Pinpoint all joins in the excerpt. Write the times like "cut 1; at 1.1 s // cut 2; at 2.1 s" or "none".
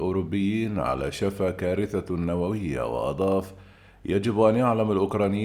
none